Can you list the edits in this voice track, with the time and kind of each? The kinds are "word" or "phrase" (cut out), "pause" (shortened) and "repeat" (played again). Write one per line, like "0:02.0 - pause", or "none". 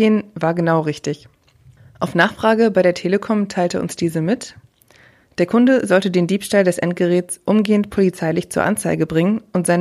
none